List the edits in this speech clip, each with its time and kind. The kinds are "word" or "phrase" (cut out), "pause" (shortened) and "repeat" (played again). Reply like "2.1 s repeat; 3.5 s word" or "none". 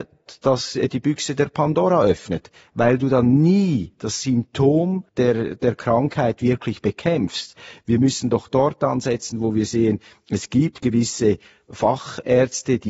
5.1 s pause